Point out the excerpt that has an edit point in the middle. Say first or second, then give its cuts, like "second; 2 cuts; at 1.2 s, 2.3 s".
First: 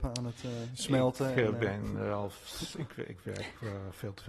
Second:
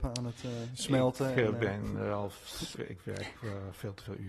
second; 1 cut; at 2.8 s